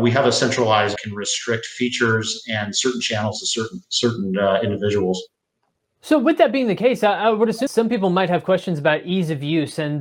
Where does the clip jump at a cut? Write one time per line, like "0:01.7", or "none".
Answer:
0:01.0
0:03.8
0:07.7